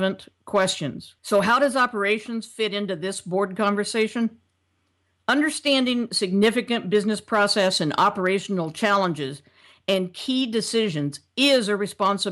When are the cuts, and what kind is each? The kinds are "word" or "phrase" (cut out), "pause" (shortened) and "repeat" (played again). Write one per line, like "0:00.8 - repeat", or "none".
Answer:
0:01.2 - pause